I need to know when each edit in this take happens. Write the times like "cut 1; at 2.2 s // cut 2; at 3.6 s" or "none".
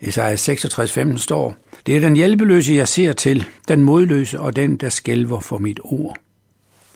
cut 1; at 1.8 s // cut 2; at 3.6 s